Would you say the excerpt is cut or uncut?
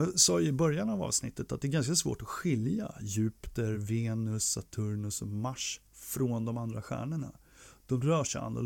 uncut